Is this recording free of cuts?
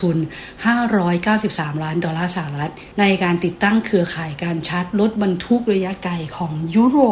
no; 1 cut; at 2.9 s

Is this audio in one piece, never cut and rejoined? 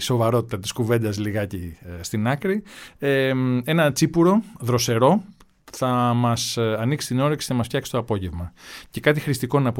yes; 0 cuts

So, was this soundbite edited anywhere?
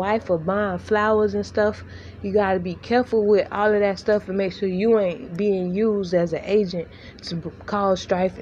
no; 0 cuts

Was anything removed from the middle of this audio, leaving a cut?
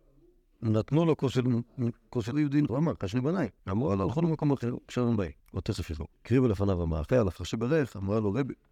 yes; 6 cuts; at 2.3 s, 2.7 s, 3.6 s, 5.4 s, 6.1 s, 7.4 s

